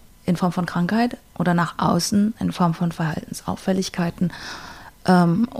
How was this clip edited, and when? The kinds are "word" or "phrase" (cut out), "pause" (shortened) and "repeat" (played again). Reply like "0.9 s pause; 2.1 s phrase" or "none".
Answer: none